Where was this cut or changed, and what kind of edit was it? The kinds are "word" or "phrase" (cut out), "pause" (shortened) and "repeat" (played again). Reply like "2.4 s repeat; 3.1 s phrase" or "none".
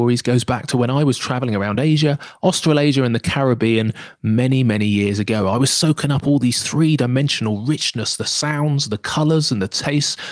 none